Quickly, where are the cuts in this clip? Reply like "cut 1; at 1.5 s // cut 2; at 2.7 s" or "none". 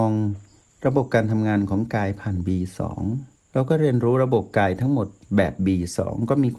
cut 1; at 3.3 s